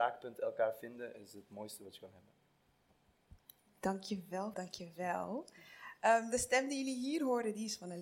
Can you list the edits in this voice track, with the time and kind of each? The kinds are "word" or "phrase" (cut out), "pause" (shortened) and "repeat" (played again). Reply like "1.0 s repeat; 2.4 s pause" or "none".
4.5 s word